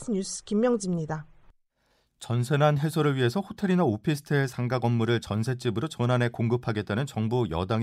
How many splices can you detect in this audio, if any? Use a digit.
0